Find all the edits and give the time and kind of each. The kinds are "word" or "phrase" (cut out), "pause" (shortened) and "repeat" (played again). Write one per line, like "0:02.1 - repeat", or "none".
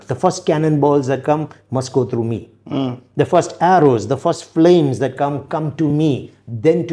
none